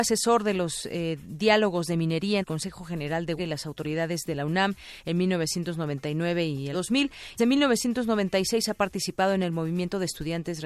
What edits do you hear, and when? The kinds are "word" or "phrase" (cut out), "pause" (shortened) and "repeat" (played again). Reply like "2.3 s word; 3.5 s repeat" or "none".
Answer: 2.4 s word; 3.4 s word; 6.7 s word; 7.4 s word